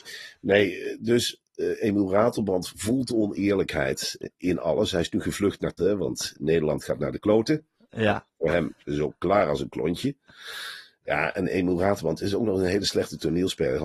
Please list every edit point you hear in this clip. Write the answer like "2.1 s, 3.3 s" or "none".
5.8 s, 8.8 s